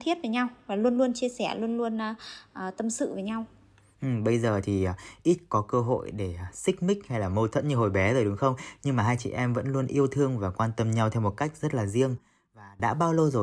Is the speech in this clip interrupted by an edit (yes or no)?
no